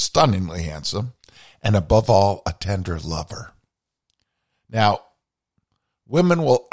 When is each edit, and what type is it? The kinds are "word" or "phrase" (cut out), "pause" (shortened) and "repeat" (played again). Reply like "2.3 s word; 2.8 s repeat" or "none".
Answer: none